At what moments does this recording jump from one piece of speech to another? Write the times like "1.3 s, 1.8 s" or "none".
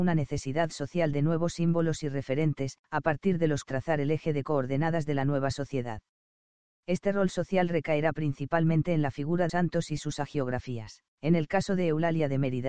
2.8 s, 3.7 s, 9.5 s, 11.1 s